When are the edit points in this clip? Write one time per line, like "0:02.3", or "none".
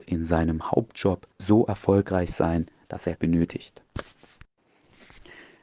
0:01.3
0:03.2